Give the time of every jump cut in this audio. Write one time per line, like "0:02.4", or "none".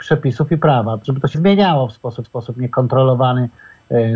0:01.0
0:01.3
0:02.2